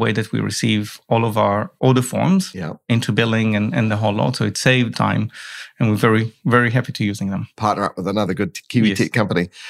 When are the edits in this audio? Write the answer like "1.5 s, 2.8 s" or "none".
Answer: 4.9 s